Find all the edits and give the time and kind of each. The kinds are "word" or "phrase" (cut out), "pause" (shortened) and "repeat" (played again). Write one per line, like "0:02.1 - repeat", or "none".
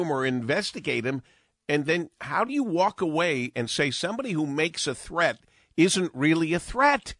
none